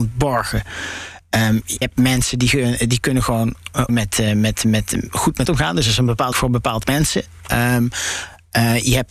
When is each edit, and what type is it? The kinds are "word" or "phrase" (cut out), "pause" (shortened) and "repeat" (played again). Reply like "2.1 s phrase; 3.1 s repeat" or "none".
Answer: 1.8 s word; 3.9 s word; 5.4 s word; 6.3 s word; 6.8 s word